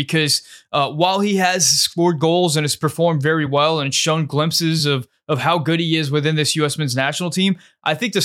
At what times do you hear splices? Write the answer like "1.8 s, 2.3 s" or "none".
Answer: none